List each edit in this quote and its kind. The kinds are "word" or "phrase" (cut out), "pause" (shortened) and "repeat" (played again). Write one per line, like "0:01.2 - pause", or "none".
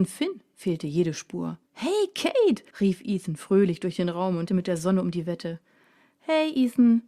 0:01.7 - pause
0:02.7 - pause
0:04.5 - word